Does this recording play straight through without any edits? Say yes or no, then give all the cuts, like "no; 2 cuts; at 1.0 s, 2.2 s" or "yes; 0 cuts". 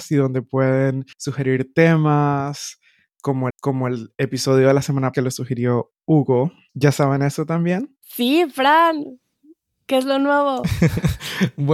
no; 4 cuts; at 1.1 s, 3.5 s, 5.1 s, 8.0 s